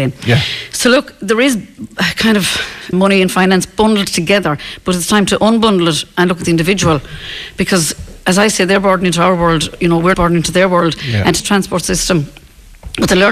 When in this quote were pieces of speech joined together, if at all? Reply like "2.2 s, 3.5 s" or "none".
2.9 s, 10.1 s, 11.4 s